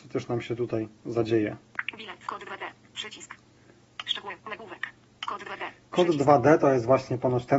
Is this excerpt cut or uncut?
cut